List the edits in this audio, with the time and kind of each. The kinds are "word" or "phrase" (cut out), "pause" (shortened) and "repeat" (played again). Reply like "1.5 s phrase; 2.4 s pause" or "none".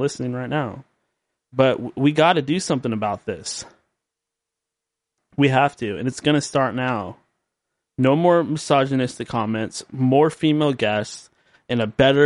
none